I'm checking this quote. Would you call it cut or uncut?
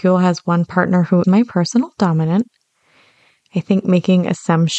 cut